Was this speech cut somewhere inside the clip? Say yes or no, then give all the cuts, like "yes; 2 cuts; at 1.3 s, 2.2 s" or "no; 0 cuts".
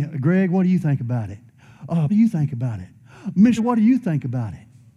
yes; 2 cuts; at 2.1 s, 3.6 s